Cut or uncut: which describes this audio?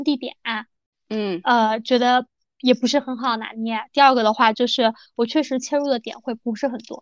uncut